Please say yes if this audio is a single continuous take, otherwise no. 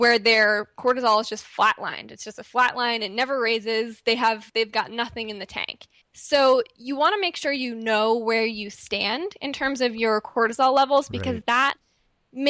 no